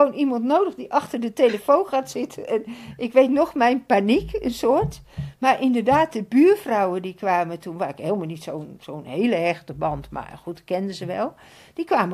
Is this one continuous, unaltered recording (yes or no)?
yes